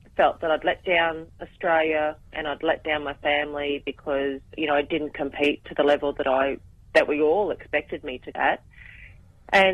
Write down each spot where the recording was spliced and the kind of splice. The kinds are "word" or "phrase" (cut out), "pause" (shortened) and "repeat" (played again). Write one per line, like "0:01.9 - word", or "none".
0:04.5 - pause
0:08.3 - word

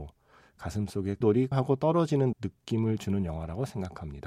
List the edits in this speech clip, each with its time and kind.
0:01.2 - word
0:01.5 - word
0:02.3 - word

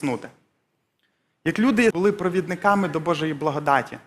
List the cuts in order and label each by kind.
0:01.9 - phrase

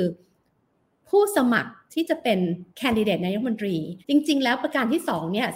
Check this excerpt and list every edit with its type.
0:02.7 - pause
0:04.0 - pause

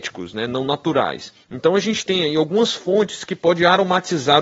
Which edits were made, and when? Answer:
0:01.4 - pause

